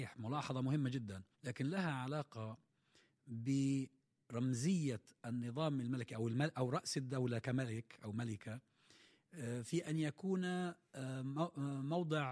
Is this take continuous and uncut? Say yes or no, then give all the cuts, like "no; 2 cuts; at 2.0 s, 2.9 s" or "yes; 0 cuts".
no; 1 cut; at 1.3 s